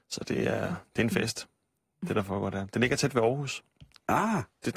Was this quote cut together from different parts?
no; 0 cuts

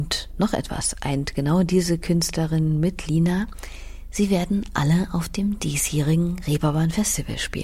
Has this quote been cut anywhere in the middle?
no; 0 cuts

